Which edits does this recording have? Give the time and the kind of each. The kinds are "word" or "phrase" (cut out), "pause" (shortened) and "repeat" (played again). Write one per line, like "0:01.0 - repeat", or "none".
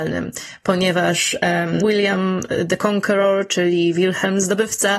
0:01.8 - word